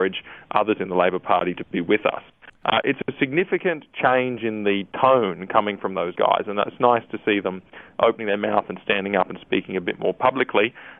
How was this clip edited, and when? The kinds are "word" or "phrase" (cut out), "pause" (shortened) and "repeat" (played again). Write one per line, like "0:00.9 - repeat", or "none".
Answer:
none

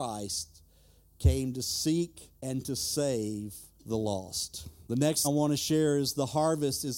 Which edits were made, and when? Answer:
0:02.3 - pause
0:03.7 - pause
0:04.8 - pause
0:05.2 - word

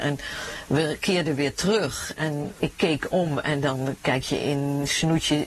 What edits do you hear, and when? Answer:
none

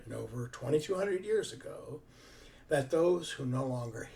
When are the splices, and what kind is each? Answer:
none

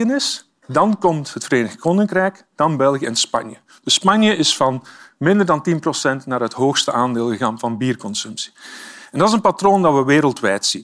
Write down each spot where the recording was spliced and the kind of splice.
none

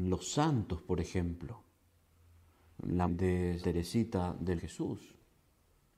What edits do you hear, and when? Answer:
0:03.1 - word
0:03.6 - word
0:04.6 - word

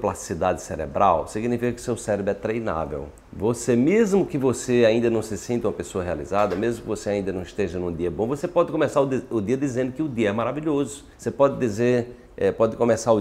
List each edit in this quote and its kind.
0:03.2 - pause
0:11.1 - pause

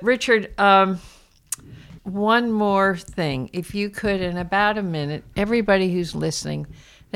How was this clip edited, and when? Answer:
0:02.0 - word
0:05.3 - word

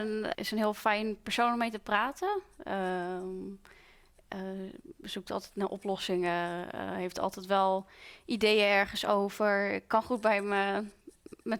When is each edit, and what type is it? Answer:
none

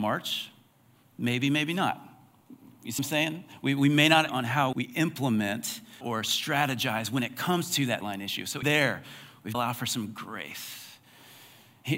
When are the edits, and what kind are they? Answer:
0:03.0 - word
0:04.3 - word
0:04.7 - word
0:06.0 - word
0:08.0 - word
0:08.6 - word
0:09.5 - phrase

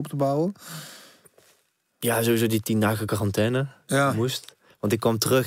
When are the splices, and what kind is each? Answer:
none

